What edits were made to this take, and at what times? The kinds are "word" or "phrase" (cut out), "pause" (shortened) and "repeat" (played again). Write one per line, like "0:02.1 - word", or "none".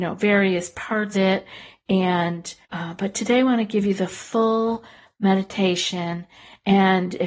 0:01.1 - word
0:02.6 - pause